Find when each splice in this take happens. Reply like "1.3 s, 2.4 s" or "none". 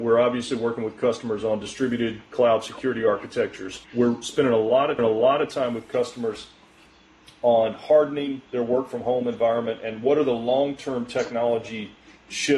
3.8 s, 5.0 s, 8.5 s